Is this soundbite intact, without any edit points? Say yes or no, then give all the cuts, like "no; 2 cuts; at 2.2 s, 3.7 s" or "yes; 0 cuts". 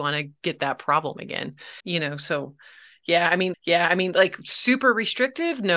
no; 2 cuts; at 1.8 s, 3.5 s